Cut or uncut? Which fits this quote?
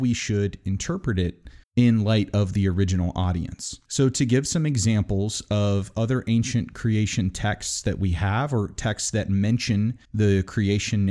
cut